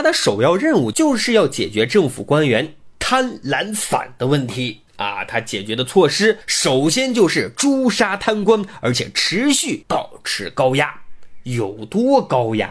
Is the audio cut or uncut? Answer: cut